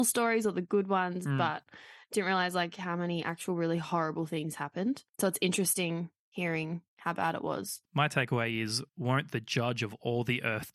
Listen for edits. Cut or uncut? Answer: cut